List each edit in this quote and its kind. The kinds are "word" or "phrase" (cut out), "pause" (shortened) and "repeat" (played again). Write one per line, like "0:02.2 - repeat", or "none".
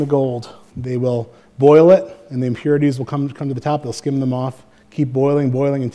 none